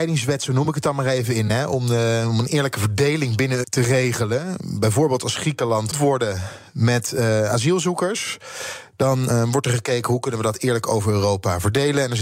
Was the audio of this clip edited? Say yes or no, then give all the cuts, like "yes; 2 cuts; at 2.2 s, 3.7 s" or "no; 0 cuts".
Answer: yes; 2 cuts; at 3.6 s, 5.9 s